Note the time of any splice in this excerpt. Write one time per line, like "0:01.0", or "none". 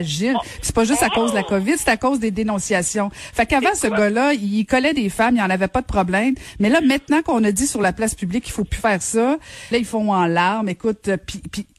0:09.7